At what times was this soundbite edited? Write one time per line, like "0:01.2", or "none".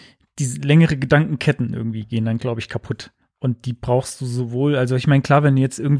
0:03.2